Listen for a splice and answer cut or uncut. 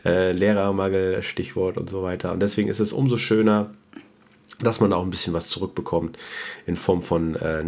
uncut